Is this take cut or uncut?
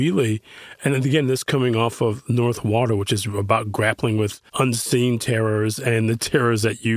cut